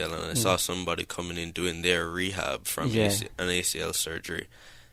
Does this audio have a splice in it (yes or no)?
no